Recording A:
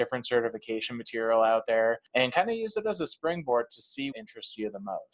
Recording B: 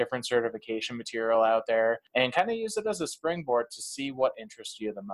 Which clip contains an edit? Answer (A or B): A